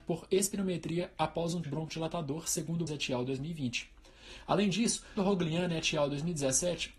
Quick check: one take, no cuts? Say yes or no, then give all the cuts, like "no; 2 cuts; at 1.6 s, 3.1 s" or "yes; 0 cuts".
no; 3 cuts; at 1.6 s, 2.9 s, 5.2 s